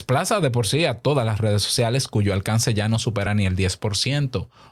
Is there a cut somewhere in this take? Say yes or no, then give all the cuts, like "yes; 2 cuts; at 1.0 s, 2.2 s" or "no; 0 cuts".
no; 0 cuts